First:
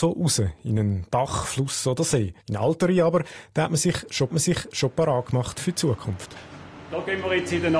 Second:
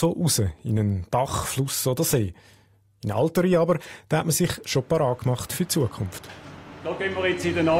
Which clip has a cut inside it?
first; 2 cuts; at 2.4 s, 4.3 s

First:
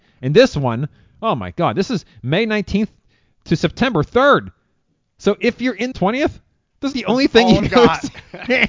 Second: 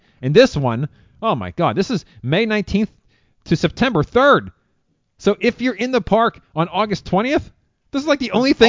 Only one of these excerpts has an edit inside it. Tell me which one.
first; 3 cuts; at 5.9 s, 6.9 s, 7.6 s

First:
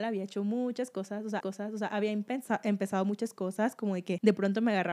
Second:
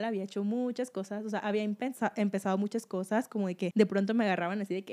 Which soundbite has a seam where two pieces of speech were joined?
first; 1 cut; at 1.4 s

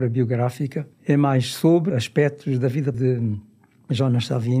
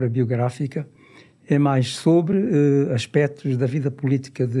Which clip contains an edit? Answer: first; 3 cuts; at 0.9 s, 1.9 s, 2.9 s

